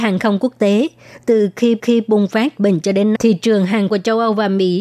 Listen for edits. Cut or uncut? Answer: cut